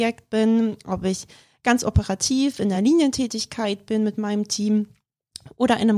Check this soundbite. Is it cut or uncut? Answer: uncut